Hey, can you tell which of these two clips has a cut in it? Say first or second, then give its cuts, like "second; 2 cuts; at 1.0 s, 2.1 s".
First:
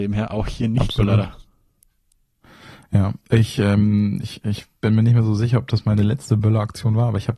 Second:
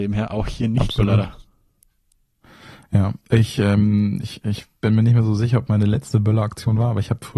second; 1 cut; at 5.7 s